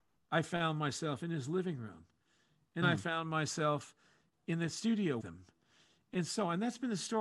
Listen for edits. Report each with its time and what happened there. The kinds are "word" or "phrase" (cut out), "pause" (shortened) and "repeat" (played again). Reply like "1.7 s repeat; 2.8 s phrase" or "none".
2.8 s word; 5.2 s word